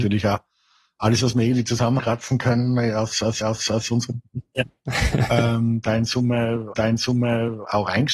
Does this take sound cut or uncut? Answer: cut